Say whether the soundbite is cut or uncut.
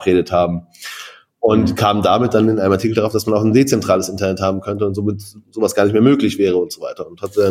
uncut